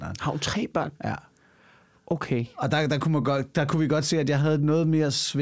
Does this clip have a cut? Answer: no; 0 cuts

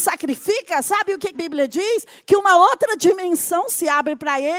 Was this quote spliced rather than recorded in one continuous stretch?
yes; 1 cut; at 1.3 s

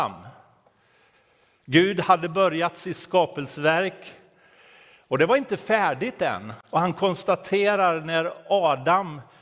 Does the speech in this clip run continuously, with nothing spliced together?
yes; 0 cuts

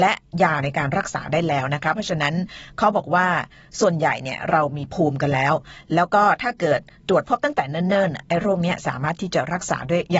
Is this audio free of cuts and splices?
yes; 0 cuts

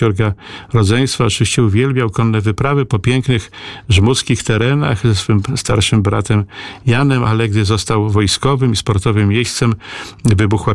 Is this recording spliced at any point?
no; 0 cuts

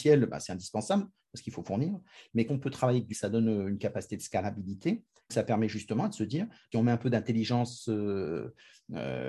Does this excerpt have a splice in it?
yes; 4 cuts; at 2.5 s, 3.1 s, 5.3 s, 6.7 s

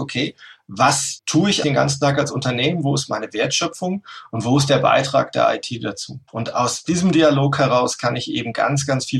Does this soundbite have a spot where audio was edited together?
yes; 2 cuts; at 1.6 s, 6.3 s

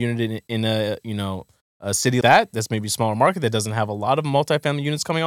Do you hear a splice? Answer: yes; 1 cut; at 2.2 s

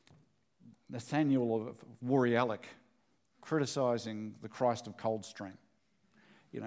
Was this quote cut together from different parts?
no; 0 cuts

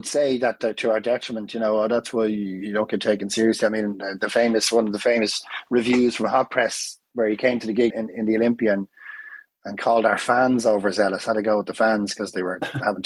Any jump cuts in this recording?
yes; 1 cut; at 7.9 s

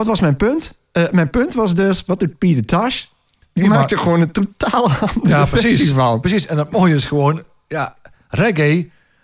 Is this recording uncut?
yes; 0 cuts

